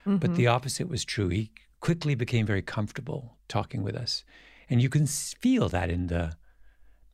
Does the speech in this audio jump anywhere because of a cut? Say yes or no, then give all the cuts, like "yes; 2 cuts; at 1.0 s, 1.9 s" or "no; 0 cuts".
no; 0 cuts